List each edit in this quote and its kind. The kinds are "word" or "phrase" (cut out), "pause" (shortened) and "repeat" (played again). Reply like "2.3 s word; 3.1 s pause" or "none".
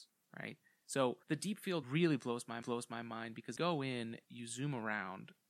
1.2 s pause; 1.8 s word; 2.6 s repeat; 3.6 s phrase; 4.2 s word

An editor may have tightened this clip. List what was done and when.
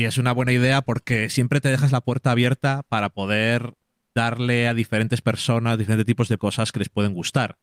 6.4 s word

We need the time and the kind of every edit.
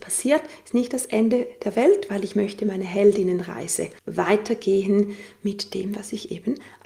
4.0 s pause

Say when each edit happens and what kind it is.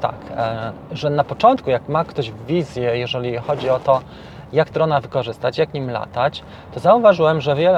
4.7 s word

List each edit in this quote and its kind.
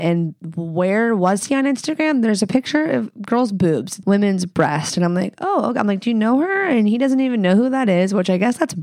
4.0 s word

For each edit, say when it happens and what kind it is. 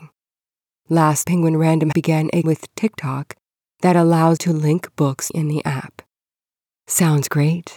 1.2 s word; 1.9 s word; 2.4 s word; 4.4 s word; 5.3 s word

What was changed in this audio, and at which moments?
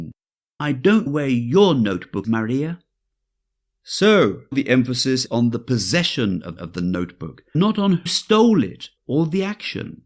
1.1 s word; 2.2 s word; 4.5 s word; 5.3 s word; 6.6 s repeat; 7.5 s word; 8.1 s word; 9.0 s pause

